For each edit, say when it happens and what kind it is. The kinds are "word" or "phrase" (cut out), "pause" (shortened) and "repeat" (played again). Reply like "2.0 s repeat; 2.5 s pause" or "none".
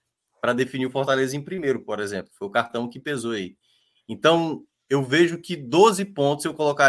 none